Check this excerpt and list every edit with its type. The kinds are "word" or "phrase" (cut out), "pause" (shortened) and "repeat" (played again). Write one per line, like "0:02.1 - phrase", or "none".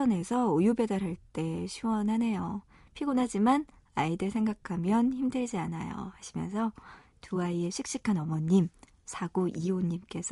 none